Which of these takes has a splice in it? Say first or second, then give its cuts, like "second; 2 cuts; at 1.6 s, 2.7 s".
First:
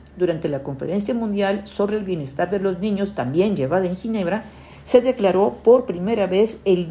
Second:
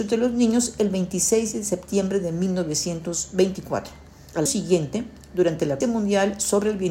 second; 2 cuts; at 4.5 s, 5.8 s